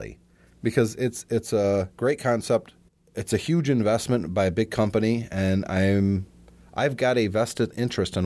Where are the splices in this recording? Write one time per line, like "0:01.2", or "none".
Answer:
0:01.9
0:02.9